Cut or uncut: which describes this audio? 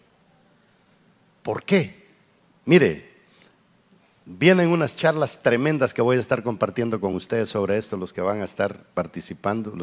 uncut